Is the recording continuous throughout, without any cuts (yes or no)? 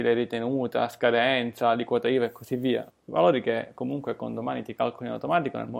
no